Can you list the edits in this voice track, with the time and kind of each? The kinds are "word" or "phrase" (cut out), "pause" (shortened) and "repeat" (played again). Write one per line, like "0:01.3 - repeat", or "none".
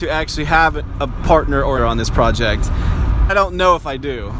0:01.8 - word
0:03.3 - word